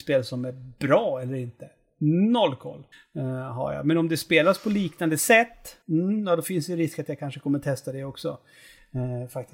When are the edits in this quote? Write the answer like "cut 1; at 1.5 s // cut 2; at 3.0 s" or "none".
cut 1; at 2.9 s // cut 2; at 5.8 s